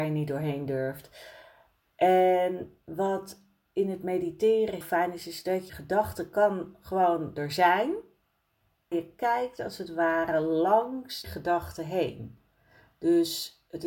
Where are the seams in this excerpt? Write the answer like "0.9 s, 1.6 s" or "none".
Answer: 4.8 s, 5.7 s, 8.9 s, 11.2 s